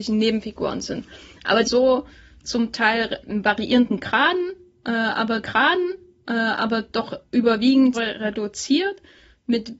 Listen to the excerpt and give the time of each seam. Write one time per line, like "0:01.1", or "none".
0:01.6
0:03.2
0:05.4
0:07.9